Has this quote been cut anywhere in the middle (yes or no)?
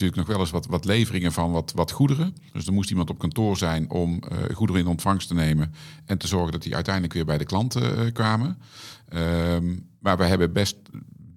yes